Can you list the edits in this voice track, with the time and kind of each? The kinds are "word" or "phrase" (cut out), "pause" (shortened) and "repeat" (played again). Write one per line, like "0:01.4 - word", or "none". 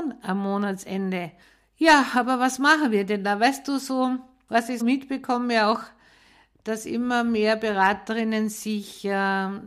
0:04.8 - word